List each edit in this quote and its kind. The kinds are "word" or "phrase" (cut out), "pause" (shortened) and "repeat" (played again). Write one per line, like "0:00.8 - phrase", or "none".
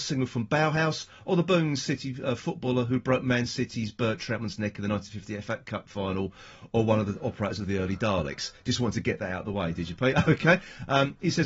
none

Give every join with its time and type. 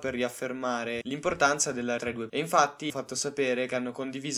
0:01.0 - word
0:02.0 - word
0:02.3 - word
0:02.9 - word

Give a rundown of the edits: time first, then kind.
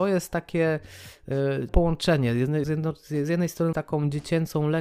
0:01.7 - word
0:02.6 - word
0:03.7 - word

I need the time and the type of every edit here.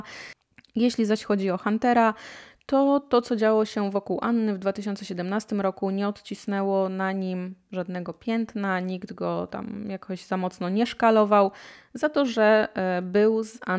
none

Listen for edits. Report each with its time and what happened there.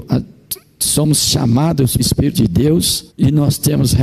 0:02.0 - word
0:02.3 - word
0:03.1 - pause

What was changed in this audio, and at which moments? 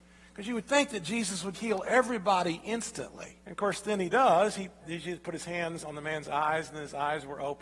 0:01.5 - word
0:03.4 - pause
0:04.8 - phrase

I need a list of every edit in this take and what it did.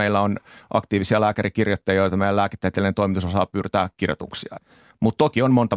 none

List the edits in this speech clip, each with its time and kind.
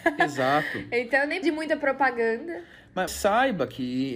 0:01.4 - word
0:03.1 - word

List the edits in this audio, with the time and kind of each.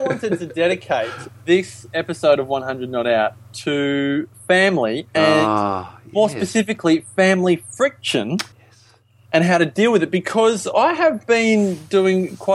0:08.5 - pause

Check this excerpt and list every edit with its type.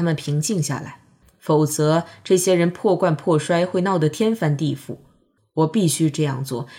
none

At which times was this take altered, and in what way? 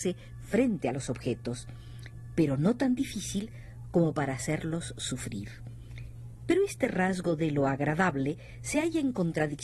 none

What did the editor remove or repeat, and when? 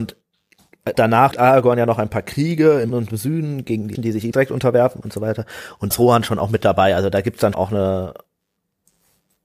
0:00.9 - word
0:01.3 - word
0:02.9 - word
0:03.9 - word
0:04.3 - word
0:05.0 - word
0:05.9 - word
0:07.5 - word

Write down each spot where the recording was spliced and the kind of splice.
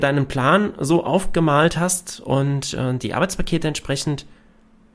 none

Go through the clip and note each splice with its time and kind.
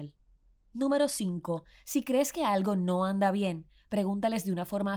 none

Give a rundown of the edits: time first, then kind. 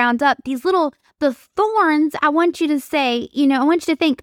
none

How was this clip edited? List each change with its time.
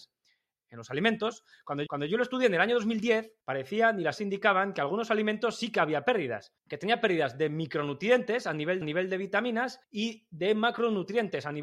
0:01.9 - repeat
0:03.4 - pause
0:04.2 - word
0:06.6 - pause
0:08.8 - repeat
0:09.8 - pause

